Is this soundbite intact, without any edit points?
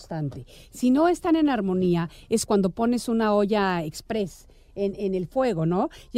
no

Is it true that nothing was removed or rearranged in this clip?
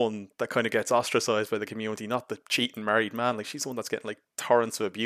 yes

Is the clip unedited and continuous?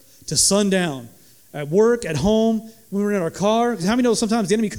yes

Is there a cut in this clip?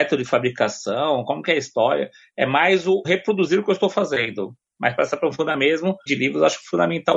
yes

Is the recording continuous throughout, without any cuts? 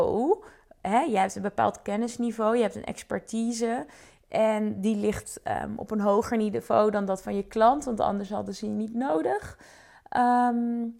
yes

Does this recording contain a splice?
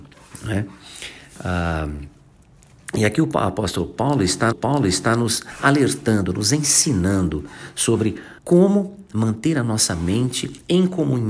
yes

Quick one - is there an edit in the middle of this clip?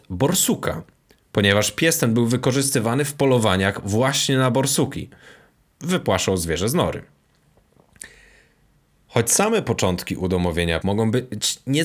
yes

